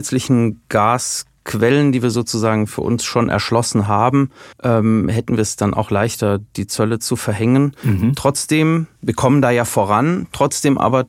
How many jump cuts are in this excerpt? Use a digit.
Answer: 2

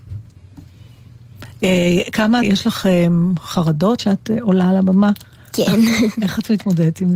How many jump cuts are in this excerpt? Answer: 2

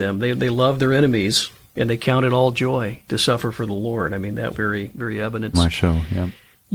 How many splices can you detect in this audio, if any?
2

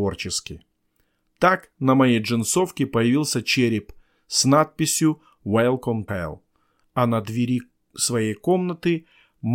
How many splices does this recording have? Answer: 1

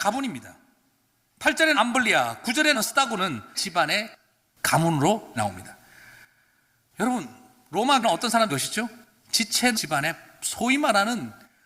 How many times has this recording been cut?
7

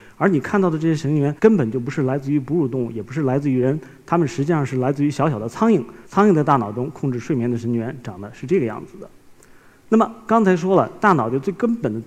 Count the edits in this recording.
2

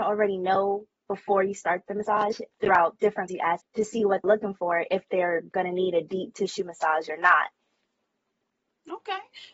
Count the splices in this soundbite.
4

